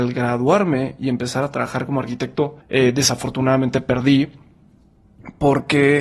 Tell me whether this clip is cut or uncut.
cut